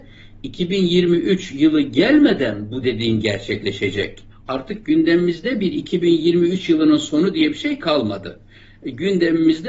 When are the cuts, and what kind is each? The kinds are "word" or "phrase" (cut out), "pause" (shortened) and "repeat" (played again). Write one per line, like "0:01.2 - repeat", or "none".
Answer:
none